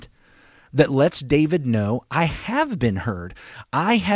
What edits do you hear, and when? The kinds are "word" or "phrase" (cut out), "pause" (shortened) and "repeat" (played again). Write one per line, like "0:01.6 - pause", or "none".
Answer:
none